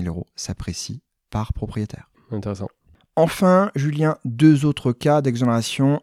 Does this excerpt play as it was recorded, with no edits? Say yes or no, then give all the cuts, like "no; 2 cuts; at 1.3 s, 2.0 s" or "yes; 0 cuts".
yes; 0 cuts